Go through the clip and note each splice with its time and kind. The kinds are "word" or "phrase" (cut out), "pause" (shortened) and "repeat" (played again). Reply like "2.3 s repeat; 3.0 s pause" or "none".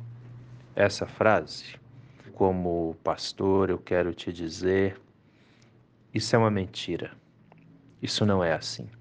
2.3 s word